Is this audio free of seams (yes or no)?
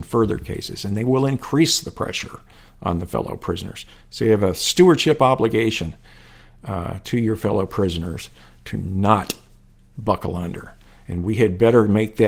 yes